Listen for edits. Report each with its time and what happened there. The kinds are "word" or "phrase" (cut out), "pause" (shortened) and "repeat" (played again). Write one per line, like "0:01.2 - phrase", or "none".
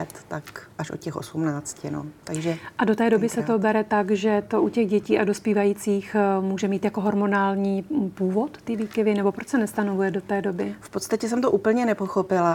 none